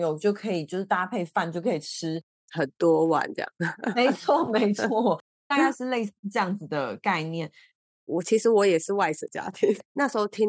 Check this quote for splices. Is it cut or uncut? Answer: uncut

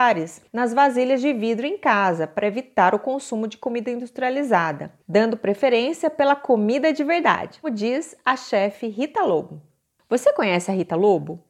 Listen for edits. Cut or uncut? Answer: cut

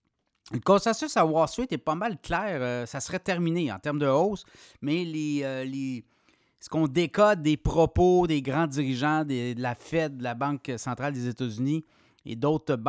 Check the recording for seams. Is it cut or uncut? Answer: uncut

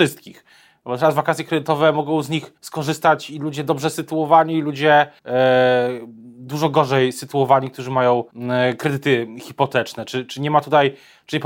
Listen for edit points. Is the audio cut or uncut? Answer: cut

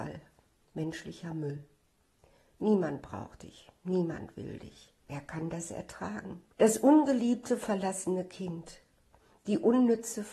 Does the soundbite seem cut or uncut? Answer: cut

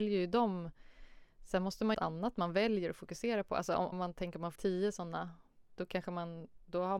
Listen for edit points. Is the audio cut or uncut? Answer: cut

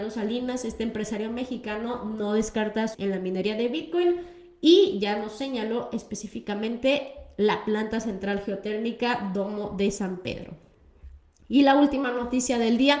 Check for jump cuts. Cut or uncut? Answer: cut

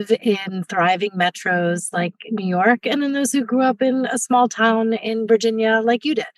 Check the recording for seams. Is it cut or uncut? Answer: uncut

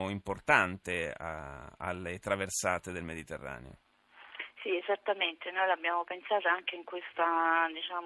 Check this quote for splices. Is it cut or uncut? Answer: uncut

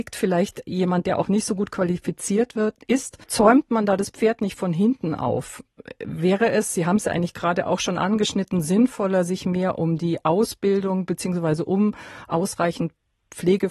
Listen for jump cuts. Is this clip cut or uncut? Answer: cut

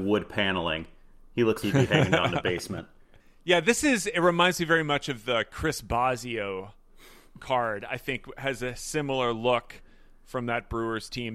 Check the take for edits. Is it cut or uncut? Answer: cut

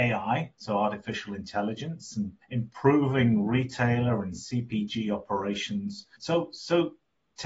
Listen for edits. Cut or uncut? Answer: cut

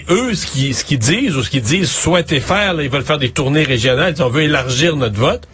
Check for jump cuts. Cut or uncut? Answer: uncut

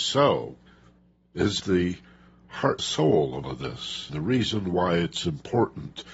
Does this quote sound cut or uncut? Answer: cut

